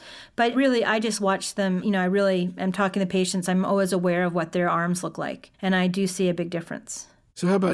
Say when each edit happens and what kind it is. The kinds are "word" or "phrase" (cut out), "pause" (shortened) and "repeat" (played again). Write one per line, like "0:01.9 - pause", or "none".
0:05.5 - pause